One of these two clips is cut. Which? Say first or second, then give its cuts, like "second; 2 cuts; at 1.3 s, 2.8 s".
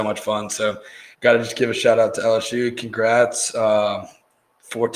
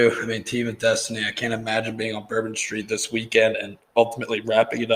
first; 1 cut; at 1.1 s